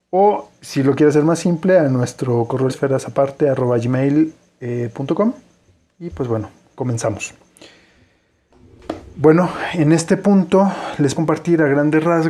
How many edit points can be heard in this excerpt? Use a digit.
2